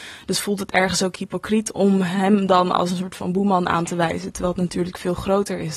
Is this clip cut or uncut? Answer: uncut